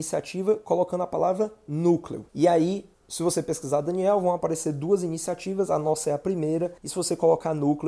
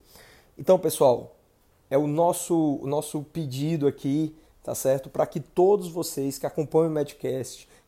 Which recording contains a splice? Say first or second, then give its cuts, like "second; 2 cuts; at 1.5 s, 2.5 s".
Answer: first; 3 cuts; at 2.3 s, 2.9 s, 6.8 s